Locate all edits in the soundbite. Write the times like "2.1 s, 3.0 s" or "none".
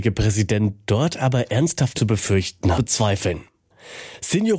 1.9 s, 2.8 s